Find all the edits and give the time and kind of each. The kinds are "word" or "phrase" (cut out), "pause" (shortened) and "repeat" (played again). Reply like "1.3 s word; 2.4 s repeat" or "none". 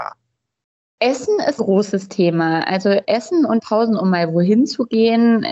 1.6 s word; 3.6 s word